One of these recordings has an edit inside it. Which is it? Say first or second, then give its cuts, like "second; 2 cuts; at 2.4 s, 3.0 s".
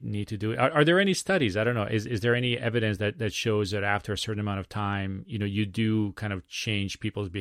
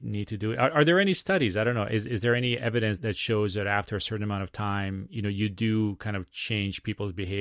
second; 1 cut; at 3.0 s